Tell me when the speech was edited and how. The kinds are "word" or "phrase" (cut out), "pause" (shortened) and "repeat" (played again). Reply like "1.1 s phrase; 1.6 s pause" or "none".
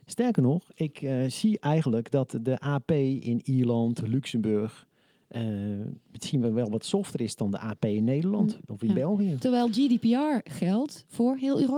none